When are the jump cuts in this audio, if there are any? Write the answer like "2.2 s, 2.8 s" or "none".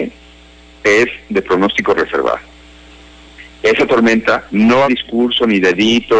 4.5 s, 4.8 s

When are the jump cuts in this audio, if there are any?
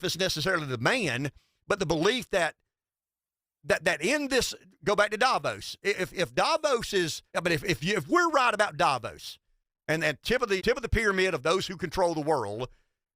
7.3 s, 10.6 s

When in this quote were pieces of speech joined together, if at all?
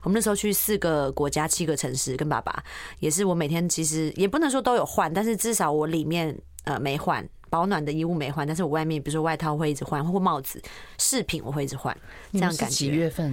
none

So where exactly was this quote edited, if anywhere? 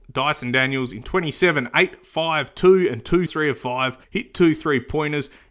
3.3 s, 4.0 s

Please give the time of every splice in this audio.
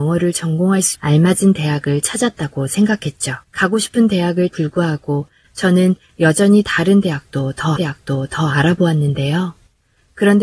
0.9 s, 3.4 s, 4.5 s, 7.8 s

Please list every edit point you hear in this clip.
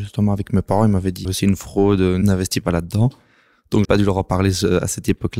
1.2 s, 3.8 s

